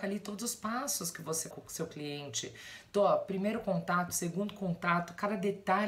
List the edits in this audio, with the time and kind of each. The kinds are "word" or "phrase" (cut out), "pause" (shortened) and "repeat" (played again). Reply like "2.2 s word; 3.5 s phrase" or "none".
1.5 s word